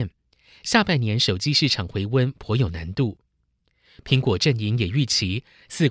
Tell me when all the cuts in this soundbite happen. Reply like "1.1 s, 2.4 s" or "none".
none